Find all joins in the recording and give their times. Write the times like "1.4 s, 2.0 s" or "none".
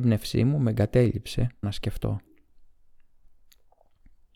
1.6 s